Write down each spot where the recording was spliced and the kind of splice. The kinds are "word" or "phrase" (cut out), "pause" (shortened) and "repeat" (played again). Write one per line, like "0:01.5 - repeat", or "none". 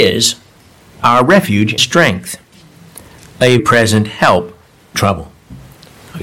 0:01.8 - word
0:03.6 - word
0:04.9 - word